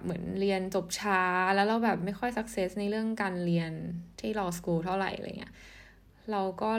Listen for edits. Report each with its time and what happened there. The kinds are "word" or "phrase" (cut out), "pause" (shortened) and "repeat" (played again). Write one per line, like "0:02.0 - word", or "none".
none